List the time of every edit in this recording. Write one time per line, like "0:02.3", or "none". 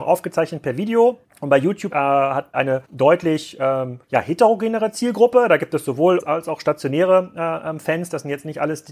0:01.2
0:01.9
0:02.5
0:02.8
0:04.0
0:06.2